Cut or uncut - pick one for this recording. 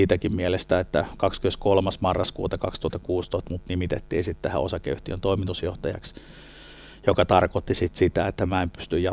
uncut